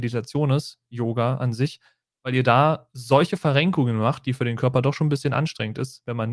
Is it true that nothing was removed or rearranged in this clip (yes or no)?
yes